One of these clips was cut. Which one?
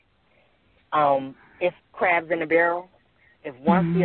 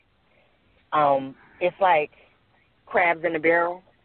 first; 1 cut; at 1.8 s

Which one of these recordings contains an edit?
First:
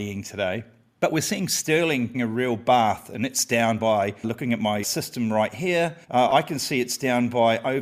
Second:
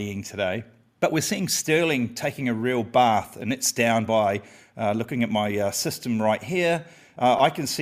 first; 4 cuts; at 2.1 s, 4.2 s, 4.8 s, 6.0 s

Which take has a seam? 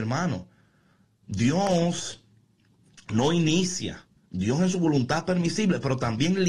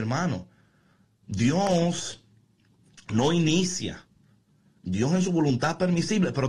first; 1 cut; at 4.2 s

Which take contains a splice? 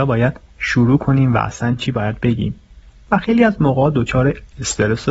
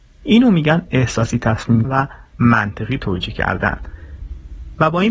second; 1 cut; at 1.8 s

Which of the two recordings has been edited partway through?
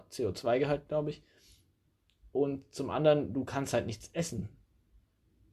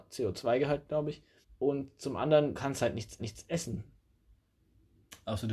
second; 3 cuts; at 1.4 s, 2.5 s, 3.2 s

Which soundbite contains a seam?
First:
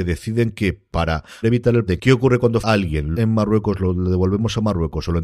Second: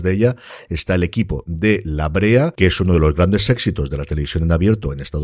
first; 4 cuts; at 1.4 s, 1.9 s, 2.6 s, 3.1 s

